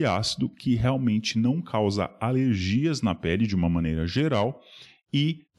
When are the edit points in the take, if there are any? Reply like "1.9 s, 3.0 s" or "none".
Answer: none